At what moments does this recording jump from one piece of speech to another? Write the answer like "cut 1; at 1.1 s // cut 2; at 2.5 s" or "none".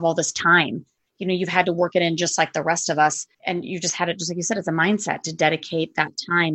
cut 1; at 3.3 s